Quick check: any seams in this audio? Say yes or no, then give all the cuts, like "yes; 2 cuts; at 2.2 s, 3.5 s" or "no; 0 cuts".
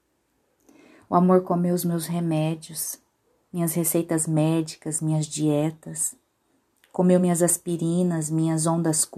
no; 0 cuts